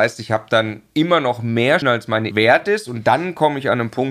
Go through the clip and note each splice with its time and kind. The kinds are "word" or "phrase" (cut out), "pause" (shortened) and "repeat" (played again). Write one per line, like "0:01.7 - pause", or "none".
0:01.8 - word
0:02.3 - word